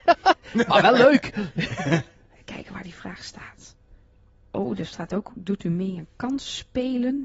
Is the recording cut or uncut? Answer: uncut